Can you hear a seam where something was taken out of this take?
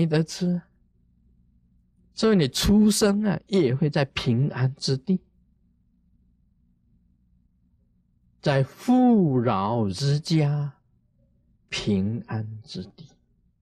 no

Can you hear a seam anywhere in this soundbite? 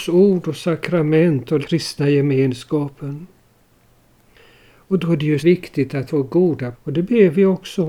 yes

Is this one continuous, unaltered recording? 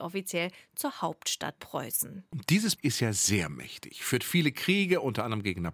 no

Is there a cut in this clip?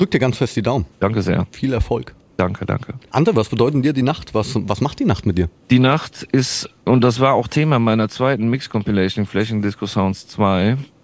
no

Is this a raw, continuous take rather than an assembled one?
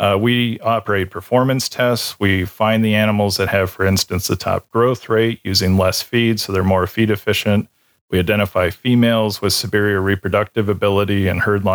yes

